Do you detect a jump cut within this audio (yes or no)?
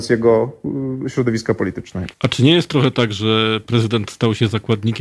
yes